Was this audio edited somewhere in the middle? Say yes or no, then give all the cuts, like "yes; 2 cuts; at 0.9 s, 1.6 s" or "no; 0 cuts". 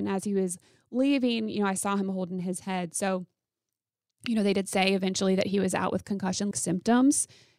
yes; 1 cut; at 6.5 s